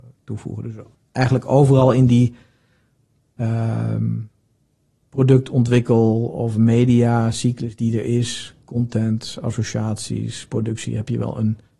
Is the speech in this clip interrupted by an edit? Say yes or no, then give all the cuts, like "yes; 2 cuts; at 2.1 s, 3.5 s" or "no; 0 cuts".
yes; 1 cut; at 0.9 s